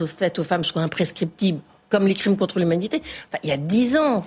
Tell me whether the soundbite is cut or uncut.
uncut